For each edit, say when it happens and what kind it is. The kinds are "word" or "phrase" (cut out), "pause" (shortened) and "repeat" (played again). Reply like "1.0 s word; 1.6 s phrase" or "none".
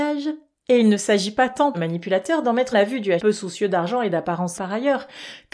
1.7 s word; 2.7 s word; 3.2 s word; 4.6 s word